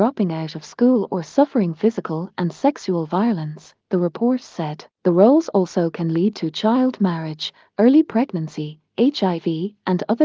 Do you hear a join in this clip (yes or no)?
yes